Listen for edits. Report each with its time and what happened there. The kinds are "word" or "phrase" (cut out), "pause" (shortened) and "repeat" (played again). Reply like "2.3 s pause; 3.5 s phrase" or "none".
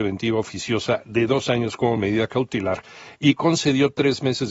none